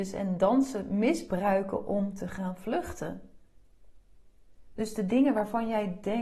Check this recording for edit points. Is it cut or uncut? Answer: uncut